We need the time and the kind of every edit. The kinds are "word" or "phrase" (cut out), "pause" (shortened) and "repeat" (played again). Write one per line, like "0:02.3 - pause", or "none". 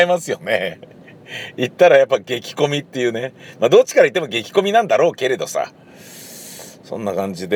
none